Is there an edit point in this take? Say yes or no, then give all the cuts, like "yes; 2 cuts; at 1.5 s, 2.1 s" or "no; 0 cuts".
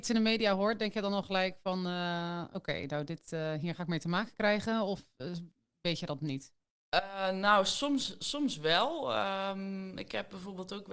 no; 0 cuts